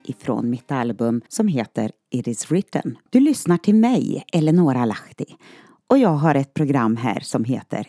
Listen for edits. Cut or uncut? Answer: cut